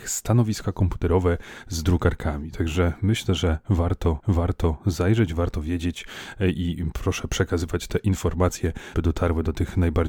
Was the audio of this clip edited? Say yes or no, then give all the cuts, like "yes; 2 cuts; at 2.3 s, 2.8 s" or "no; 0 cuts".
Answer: yes; 2 cuts; at 4.2 s, 8.9 s